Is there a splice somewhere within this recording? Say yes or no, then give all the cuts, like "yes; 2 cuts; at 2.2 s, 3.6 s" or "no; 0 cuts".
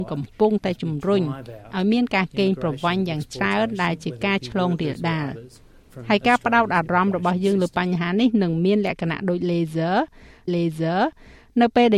yes; 1 cut; at 10.5 s